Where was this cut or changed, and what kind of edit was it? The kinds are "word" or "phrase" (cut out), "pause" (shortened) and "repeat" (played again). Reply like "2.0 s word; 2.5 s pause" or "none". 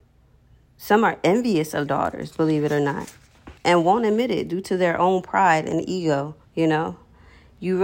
1.9 s word; 3.6 s pause; 6.4 s pause